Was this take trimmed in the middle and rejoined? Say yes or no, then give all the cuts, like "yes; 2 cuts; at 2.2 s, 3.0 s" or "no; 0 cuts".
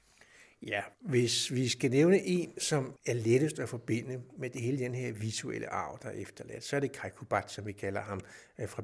yes; 1 cut; at 0.9 s